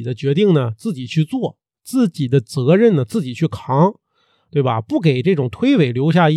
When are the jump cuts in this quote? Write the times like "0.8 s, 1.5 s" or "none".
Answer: none